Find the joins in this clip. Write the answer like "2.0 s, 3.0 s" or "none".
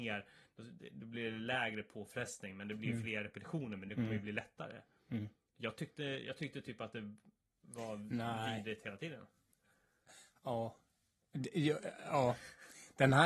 none

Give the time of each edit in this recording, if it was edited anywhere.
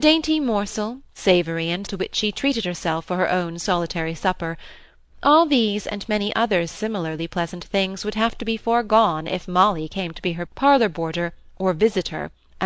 1.9 s, 10.5 s

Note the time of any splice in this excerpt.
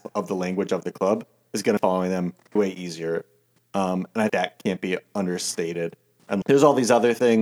1.8 s, 2.6 s, 4.3 s, 6.4 s

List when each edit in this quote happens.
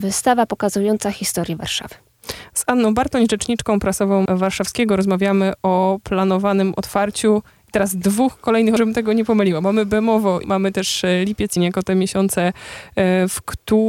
4.3 s, 8.8 s, 10.4 s, 11.6 s

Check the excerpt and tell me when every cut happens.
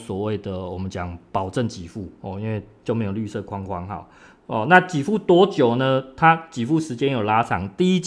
none

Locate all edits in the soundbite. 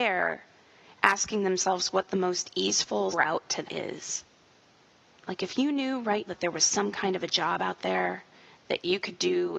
3.1 s, 3.6 s, 6.3 s

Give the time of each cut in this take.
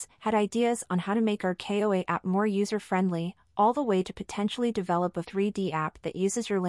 5.2 s

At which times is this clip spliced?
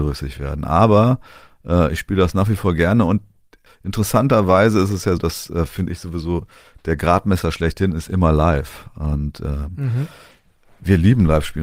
3.7 s, 5.2 s

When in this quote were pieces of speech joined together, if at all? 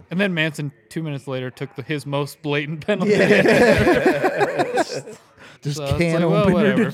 5.6 s

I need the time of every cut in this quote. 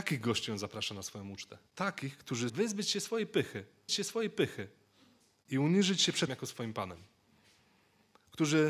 1.7 s, 2.5 s, 3.9 s, 6.3 s

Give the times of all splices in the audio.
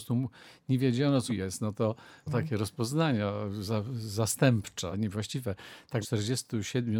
1.3 s, 2.3 s, 4.9 s, 6.0 s

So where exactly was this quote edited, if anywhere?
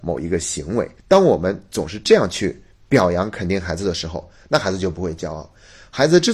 1.0 s

